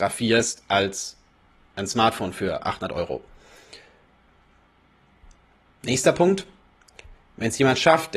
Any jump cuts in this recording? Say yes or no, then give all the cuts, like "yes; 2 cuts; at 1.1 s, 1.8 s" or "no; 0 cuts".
no; 0 cuts